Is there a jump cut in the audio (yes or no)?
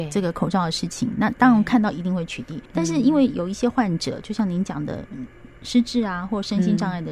yes